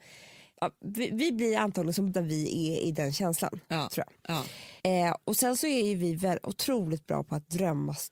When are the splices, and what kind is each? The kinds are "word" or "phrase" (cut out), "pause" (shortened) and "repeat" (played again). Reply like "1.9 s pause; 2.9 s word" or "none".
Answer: 2.1 s word; 4.8 s pause